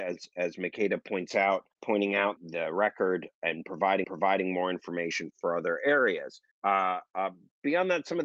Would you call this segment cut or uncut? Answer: cut